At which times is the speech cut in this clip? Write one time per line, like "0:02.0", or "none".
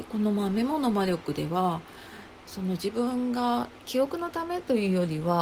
0:03.8